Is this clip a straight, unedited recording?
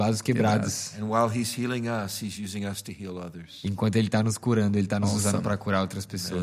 yes; 0 cuts

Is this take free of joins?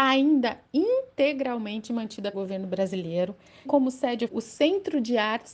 no; 3 cuts; at 2.3 s, 3.7 s, 4.3 s

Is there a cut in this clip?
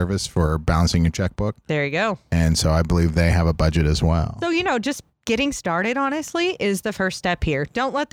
no; 0 cuts

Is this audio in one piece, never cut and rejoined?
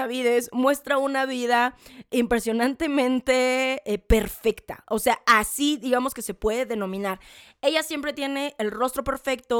yes; 0 cuts

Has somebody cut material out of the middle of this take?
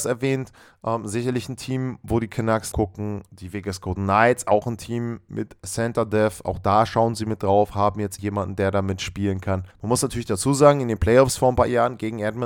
yes; 3 cuts; at 2.7 s, 8.2 s, 9.7 s

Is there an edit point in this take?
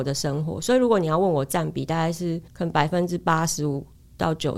yes; 1 cut; at 2.5 s

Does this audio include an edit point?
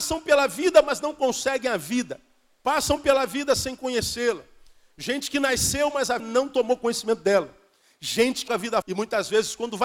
yes; 3 cuts; at 6.2 s, 8.5 s, 8.8 s

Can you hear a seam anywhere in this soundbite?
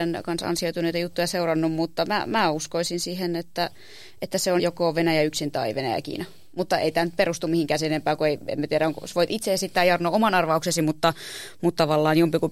yes; 1 cut; at 4.6 s

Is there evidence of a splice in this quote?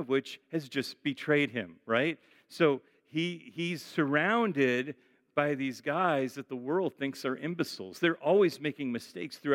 no; 0 cuts

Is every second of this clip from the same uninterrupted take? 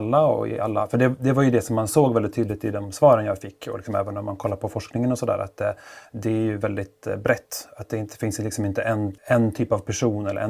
no; 1 cut; at 9.2 s

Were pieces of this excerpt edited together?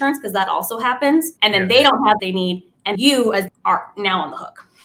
yes; 4 cuts; at 1.4 s, 2.2 s, 2.9 s, 3.5 s

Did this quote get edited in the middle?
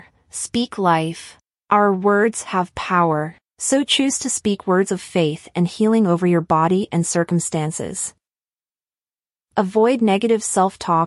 no; 0 cuts

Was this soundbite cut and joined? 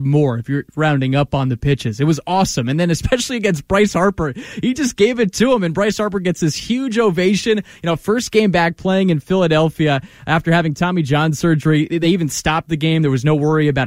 no; 0 cuts

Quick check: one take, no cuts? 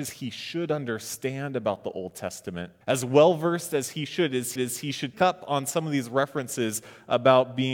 no; 3 cuts; at 2.8 s, 4.6 s, 5.1 s

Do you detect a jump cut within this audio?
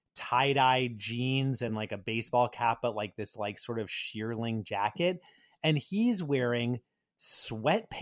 no; 0 cuts

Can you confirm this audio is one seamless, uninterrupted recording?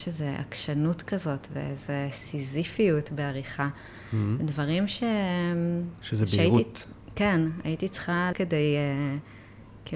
no; 1 cut; at 8.3 s

